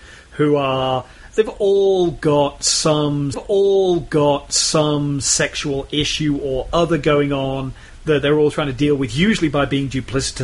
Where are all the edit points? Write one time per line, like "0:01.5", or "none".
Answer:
0:03.3